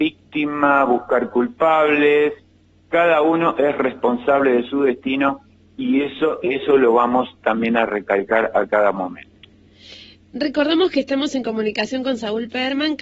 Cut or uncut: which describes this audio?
uncut